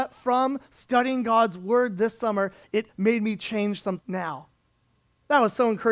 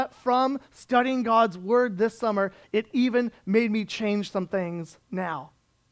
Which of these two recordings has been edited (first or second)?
first